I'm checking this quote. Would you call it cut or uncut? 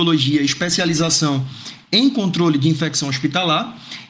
uncut